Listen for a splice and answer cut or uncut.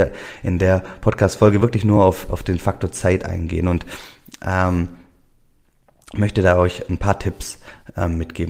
uncut